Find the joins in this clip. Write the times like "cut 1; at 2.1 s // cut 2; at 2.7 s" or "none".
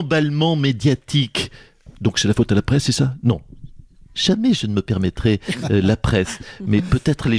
cut 1; at 5.6 s